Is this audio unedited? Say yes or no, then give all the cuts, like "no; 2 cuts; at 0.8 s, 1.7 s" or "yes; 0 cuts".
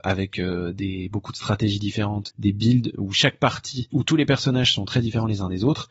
no; 2 cuts; at 2.3 s, 3.9 s